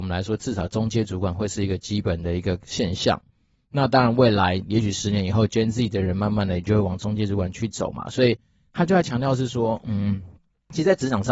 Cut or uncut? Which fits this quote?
uncut